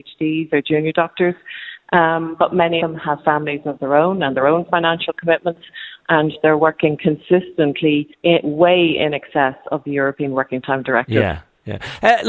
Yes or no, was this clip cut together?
yes